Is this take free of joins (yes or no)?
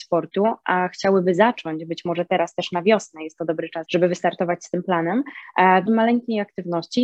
no